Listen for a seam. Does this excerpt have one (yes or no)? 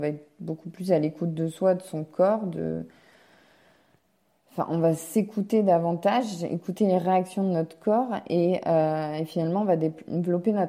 no